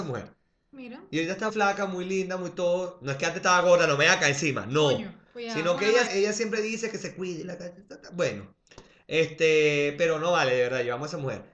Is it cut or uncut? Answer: cut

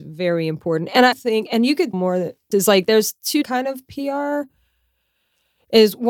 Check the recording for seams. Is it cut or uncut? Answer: cut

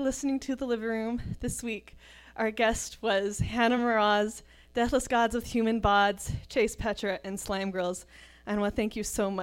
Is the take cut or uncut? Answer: uncut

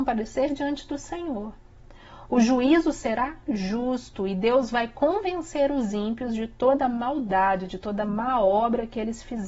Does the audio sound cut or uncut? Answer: uncut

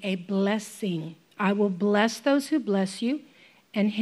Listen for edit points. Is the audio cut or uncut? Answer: cut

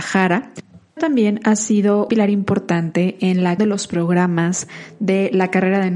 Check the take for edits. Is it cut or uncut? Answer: cut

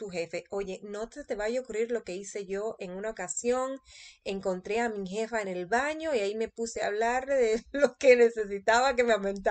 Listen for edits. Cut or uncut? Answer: uncut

